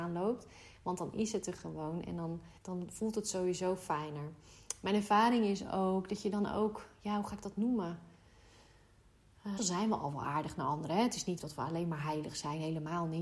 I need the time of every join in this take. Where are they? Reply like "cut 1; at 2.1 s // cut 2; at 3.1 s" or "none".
cut 1; at 2.6 s // cut 2; at 9.6 s // cut 3; at 11.4 s